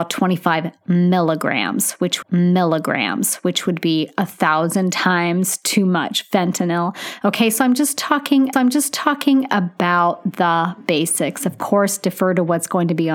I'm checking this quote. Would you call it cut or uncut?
cut